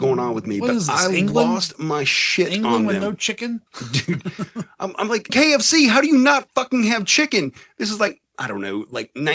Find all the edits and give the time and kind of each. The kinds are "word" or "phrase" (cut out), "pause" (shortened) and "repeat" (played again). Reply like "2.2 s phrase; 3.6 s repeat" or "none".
3.7 s pause; 5.3 s phrase